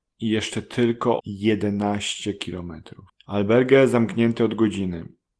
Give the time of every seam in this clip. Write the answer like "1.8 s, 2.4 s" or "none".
1.2 s, 3.1 s